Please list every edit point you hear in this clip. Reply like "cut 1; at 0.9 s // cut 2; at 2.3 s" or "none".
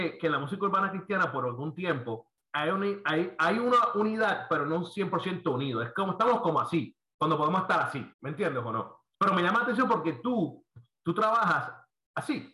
cut 1; at 2.4 s // cut 2; at 8.1 s // cut 3; at 9.1 s